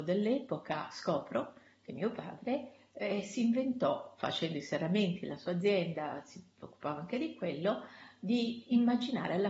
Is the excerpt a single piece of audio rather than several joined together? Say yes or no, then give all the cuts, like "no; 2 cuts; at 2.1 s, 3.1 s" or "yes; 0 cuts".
yes; 0 cuts